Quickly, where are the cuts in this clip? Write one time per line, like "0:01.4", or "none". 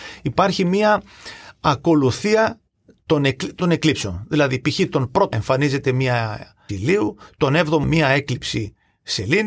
0:03.6
0:05.3
0:06.7
0:07.8